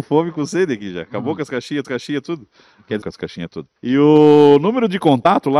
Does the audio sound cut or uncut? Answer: cut